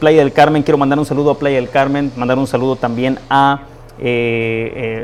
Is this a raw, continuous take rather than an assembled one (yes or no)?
yes